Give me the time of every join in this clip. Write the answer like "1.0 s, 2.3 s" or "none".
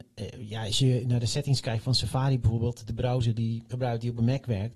3.7 s